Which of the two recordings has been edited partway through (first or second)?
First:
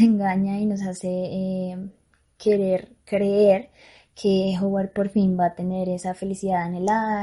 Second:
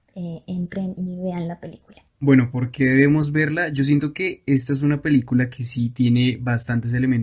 second